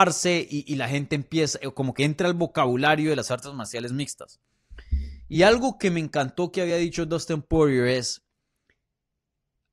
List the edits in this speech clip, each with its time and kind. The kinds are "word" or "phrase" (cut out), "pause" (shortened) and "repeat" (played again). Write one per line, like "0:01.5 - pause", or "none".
none